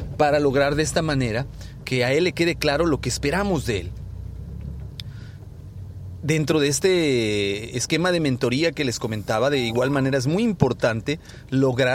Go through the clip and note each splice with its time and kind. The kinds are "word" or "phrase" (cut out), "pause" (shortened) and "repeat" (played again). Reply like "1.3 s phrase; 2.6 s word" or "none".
none